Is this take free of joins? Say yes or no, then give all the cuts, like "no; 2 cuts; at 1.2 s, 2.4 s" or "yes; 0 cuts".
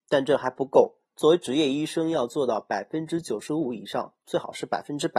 no; 1 cut; at 1.0 s